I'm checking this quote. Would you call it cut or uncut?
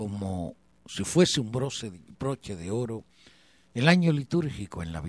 uncut